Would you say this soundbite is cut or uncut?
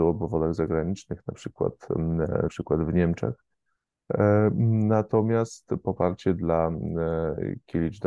cut